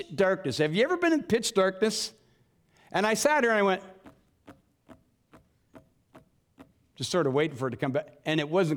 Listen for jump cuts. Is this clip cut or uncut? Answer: uncut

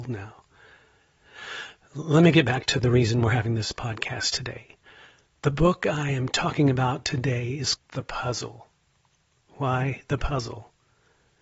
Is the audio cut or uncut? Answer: cut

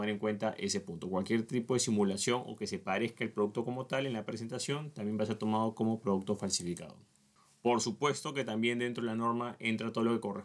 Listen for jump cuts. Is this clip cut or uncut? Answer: uncut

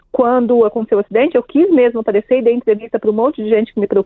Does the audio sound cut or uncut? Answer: uncut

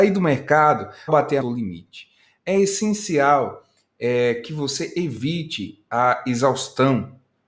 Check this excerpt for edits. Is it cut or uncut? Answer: cut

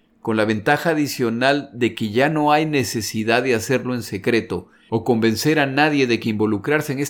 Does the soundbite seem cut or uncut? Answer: uncut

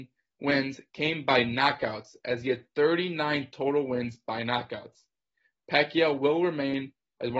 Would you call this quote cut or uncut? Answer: uncut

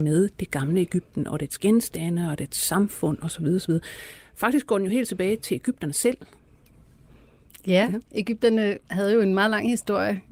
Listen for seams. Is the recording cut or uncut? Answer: cut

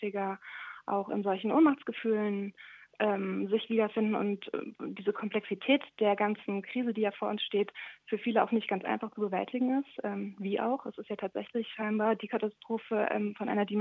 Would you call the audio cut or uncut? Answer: cut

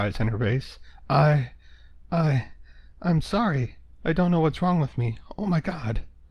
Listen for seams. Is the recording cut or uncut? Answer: uncut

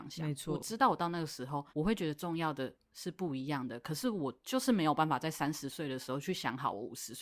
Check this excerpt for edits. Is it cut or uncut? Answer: cut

